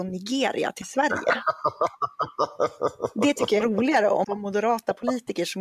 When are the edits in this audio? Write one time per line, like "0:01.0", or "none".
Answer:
0:03.6
0:04.2